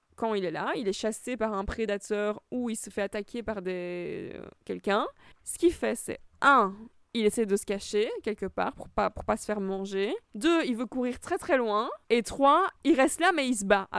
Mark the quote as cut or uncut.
cut